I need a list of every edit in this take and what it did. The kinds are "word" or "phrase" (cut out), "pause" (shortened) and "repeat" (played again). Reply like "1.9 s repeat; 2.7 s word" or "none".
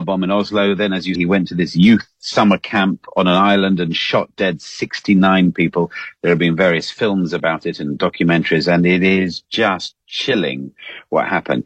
1.1 s word